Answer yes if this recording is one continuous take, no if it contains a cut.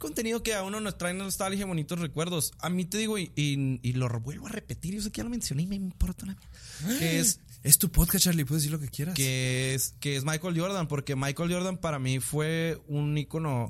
yes